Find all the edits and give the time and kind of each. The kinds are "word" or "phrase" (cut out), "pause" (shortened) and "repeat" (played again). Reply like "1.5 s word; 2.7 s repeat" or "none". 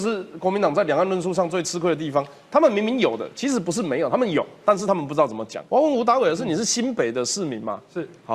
5.7 s pause